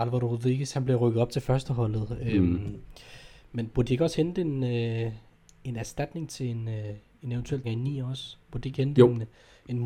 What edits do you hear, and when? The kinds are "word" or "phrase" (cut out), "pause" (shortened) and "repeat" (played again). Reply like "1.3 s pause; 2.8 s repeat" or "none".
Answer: 7.6 s word